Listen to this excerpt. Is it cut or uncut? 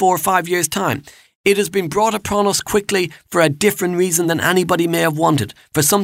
uncut